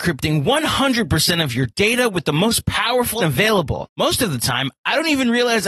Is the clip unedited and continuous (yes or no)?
no